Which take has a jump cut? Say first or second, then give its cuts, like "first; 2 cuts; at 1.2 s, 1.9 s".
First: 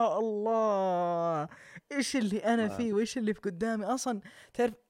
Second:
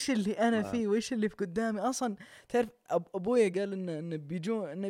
second; 1 cut; at 3.5 s